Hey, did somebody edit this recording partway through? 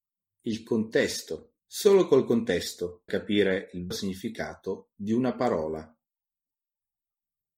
yes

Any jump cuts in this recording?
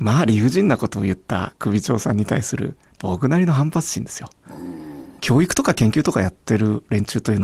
yes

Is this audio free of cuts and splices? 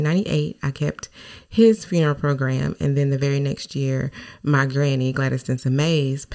yes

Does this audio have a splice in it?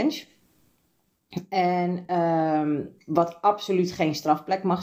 no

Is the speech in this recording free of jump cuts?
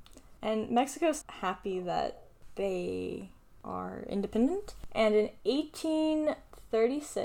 no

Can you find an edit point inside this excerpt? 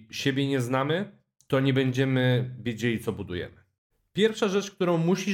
no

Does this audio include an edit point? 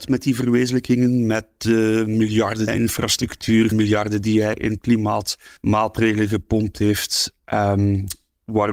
yes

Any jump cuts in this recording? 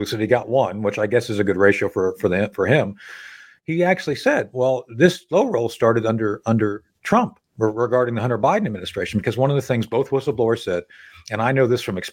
no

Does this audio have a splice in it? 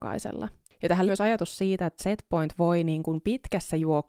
yes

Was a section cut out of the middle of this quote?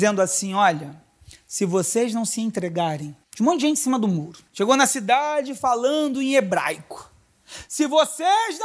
yes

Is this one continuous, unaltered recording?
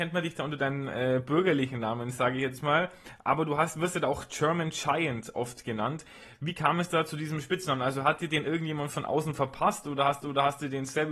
no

